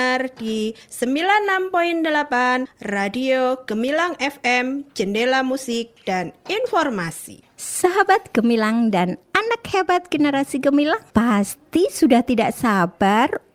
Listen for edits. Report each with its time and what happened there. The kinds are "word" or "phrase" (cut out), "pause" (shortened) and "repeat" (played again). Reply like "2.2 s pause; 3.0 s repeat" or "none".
11.1 s pause

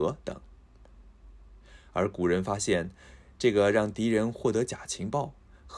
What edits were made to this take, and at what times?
none

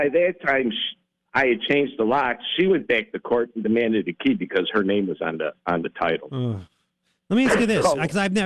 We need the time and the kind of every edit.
none

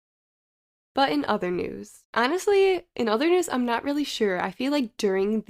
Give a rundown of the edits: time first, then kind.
2.0 s pause

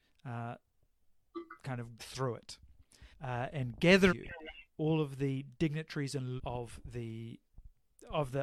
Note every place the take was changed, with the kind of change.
2.0 s word; 3.1 s pause; 4.1 s word; 4.7 s word; 6.4 s word

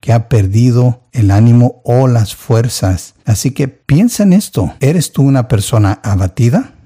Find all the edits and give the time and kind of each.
1.1 s pause; 3.2 s pause; 4.8 s pause

